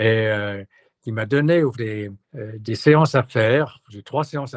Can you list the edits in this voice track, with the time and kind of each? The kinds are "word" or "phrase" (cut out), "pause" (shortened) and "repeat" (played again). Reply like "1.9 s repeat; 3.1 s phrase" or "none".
1.7 s word; 2.2 s pause